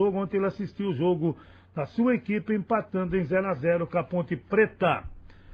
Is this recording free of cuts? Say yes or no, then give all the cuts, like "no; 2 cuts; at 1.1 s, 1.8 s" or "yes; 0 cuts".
yes; 0 cuts